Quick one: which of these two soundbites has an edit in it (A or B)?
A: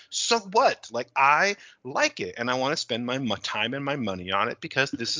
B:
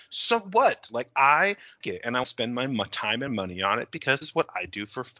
B